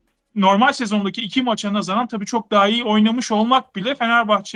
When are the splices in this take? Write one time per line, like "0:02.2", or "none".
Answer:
none